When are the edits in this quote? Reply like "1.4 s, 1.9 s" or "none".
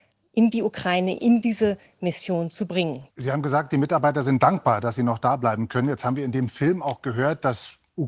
3.1 s